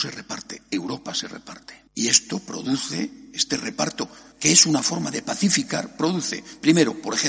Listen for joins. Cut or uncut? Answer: cut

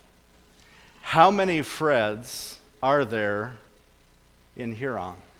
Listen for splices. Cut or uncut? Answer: uncut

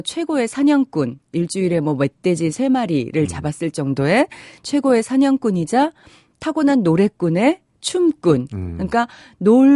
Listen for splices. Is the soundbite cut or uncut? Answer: uncut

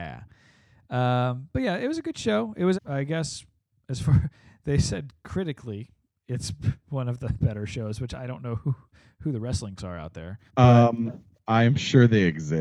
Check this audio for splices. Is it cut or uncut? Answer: cut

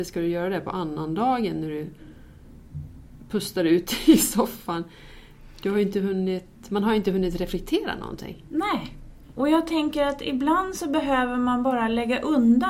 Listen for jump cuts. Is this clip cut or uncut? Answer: uncut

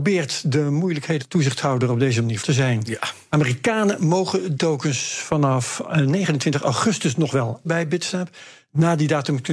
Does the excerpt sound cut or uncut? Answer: cut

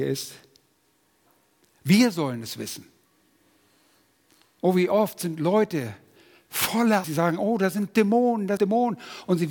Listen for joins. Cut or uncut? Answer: cut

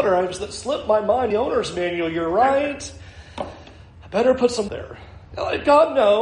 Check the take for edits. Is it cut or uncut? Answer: cut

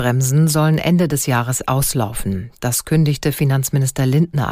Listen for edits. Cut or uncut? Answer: uncut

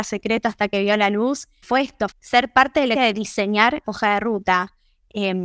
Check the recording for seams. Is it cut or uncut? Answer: cut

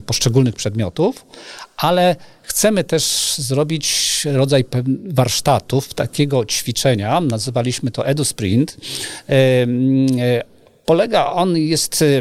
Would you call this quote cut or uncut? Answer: uncut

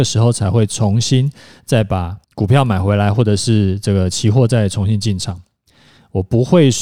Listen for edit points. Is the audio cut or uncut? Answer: cut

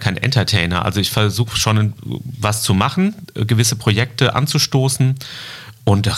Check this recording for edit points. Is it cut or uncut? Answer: uncut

